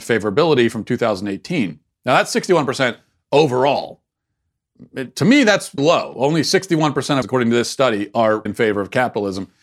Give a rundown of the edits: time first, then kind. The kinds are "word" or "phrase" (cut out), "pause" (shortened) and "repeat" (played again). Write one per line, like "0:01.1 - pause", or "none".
0:05.8 - word
0:07.2 - word
0:08.5 - word